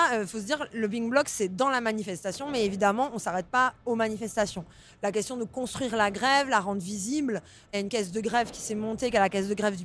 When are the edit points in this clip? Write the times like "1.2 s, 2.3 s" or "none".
none